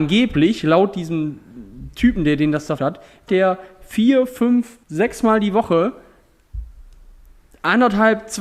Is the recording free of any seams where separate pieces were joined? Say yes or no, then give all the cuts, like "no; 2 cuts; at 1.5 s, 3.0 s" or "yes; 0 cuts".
no; 3 cuts; at 2.8 s, 3.3 s, 4.8 s